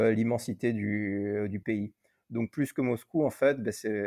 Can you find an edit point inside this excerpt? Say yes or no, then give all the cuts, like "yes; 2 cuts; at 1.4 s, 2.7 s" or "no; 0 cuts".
no; 0 cuts